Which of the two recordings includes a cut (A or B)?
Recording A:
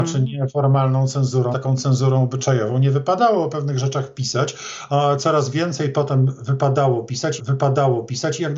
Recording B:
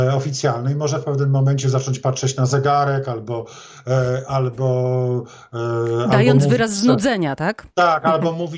A